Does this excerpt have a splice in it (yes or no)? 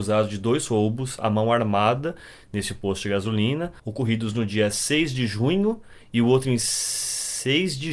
yes